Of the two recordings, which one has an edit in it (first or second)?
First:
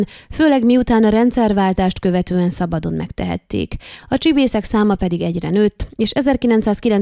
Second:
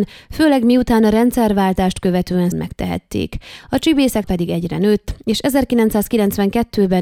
second